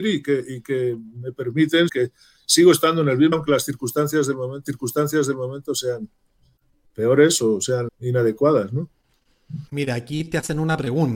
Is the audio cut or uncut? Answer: cut